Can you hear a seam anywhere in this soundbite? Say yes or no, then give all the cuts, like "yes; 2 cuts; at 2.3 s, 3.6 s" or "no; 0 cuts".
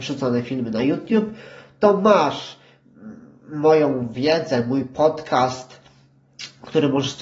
no; 0 cuts